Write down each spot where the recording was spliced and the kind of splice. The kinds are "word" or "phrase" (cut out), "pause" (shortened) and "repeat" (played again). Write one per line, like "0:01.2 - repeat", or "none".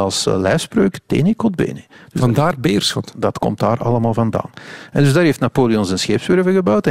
none